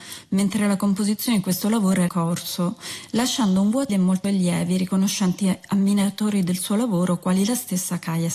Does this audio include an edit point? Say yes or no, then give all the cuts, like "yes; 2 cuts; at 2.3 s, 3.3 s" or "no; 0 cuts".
yes; 3 cuts; at 2.1 s, 3.9 s, 4.2 s